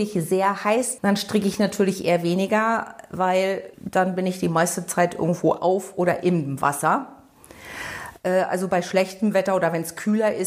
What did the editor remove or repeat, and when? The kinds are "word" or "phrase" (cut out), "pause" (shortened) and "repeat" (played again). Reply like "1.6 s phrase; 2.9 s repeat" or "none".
1.0 s phrase; 3.7 s pause